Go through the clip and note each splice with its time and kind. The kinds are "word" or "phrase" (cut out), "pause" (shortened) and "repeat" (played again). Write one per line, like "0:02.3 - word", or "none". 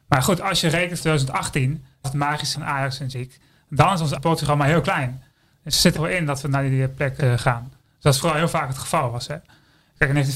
0:01.0 - word
0:02.0 - word
0:02.5 - word
0:03.1 - word
0:04.2 - word
0:06.0 - word
0:07.2 - word
0:08.2 - word